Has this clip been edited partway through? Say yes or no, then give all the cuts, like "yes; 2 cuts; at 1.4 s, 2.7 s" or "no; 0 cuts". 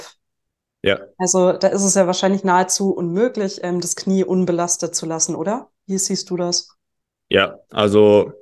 no; 0 cuts